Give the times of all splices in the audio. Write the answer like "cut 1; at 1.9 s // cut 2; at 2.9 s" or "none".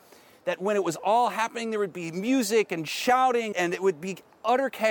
cut 1; at 3.5 s